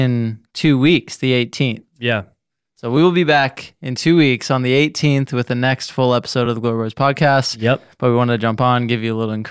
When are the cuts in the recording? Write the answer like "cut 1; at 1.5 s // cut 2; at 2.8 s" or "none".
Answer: none

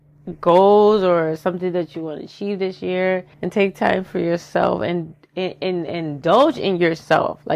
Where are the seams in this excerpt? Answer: cut 1; at 3.3 s

